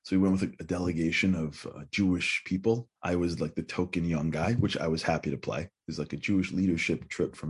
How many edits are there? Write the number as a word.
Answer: one